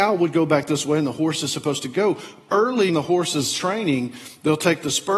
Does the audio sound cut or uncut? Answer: cut